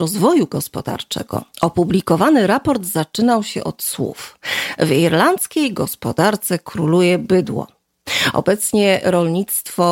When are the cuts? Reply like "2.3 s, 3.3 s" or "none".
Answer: 1.5 s